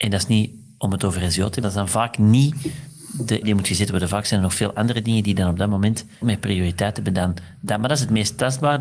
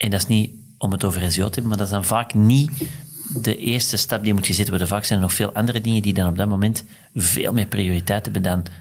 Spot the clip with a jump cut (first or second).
first